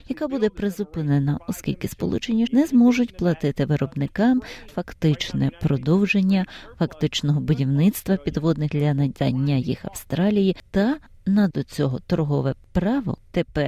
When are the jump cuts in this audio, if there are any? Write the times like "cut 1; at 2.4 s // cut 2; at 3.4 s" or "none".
cut 1; at 2.5 s // cut 2; at 4.7 s // cut 3; at 8.7 s // cut 4; at 11.5 s